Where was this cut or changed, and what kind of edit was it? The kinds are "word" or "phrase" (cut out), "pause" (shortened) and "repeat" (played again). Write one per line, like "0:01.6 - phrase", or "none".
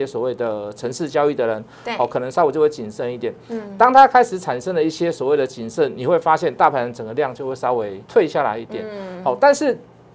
0:08.0 - pause